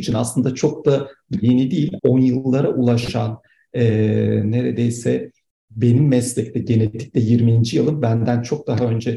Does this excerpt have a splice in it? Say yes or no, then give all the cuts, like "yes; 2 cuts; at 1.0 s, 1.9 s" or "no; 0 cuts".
yes; 1 cut; at 2.0 s